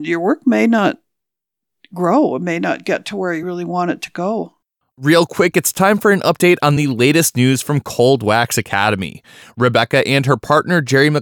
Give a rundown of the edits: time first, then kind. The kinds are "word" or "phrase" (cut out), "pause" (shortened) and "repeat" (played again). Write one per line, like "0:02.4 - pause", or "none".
none